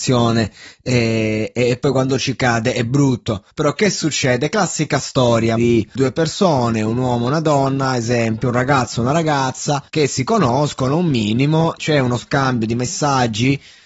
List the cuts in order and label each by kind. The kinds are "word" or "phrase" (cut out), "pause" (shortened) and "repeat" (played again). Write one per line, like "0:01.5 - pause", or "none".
0:03.5 - pause
0:05.6 - word
0:06.0 - word
0:09.9 - pause
0:11.8 - word